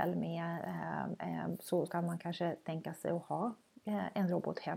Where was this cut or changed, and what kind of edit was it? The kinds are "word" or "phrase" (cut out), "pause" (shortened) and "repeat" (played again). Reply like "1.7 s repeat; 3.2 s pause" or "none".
1.9 s word